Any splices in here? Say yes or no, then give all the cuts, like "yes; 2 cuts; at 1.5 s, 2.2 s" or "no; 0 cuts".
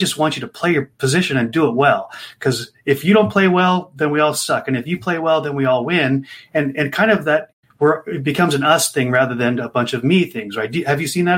no; 0 cuts